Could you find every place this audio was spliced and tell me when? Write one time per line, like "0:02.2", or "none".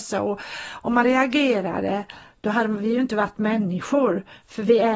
0:01.0